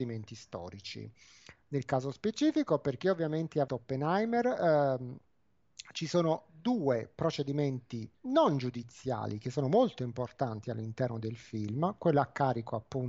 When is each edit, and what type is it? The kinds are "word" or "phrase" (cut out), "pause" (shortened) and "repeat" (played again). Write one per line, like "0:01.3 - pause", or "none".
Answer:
0:03.7 - word
0:08.1 - pause

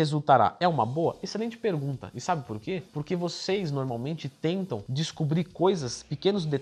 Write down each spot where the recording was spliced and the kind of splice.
none

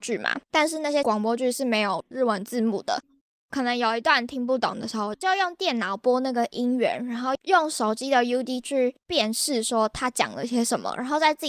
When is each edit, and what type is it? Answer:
0:08.6 - word

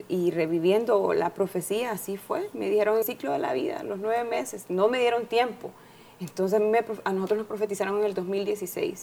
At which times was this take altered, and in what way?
0:03.0 - word

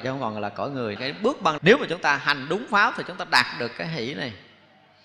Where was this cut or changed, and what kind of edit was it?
0:01.0 - phrase
0:01.6 - word

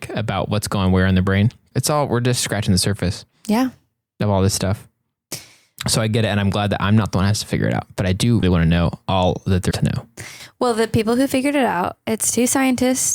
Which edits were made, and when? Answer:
0:01.7 - word
0:08.4 - word
0:09.7 - word

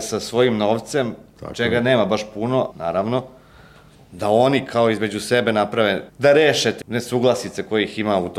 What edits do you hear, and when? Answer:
0:02.7 - phrase
0:06.1 - pause
0:06.8 - word

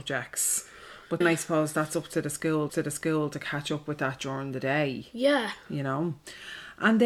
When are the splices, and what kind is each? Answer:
0:01.2 - word
0:02.7 - repeat

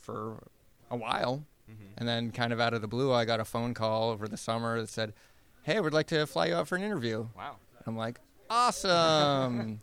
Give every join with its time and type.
none

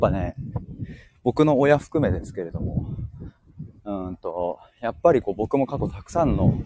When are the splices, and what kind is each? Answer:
none

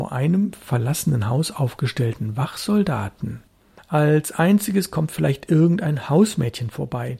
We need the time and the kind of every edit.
none

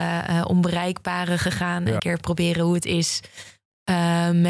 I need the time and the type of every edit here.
0:02.0 - phrase

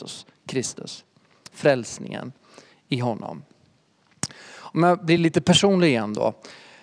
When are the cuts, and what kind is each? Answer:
none

